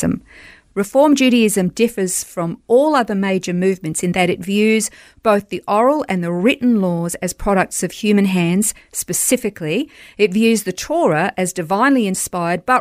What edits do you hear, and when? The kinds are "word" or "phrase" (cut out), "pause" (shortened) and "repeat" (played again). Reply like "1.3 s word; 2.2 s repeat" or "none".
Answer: none

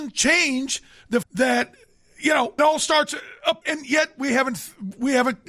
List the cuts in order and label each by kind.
1.2 s word; 2.6 s word; 3.6 s word

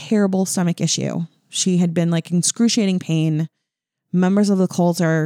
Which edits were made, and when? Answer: none

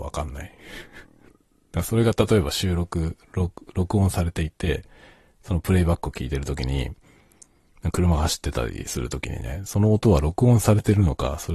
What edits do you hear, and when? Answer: none

